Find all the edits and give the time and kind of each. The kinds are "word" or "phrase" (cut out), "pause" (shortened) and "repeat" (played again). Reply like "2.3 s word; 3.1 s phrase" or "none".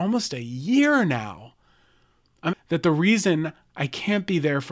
2.5 s word